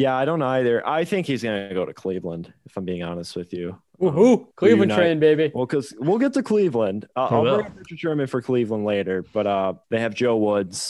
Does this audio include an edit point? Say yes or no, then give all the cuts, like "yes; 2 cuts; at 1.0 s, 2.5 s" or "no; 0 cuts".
yes; 2 cuts; at 4.5 s, 9.8 s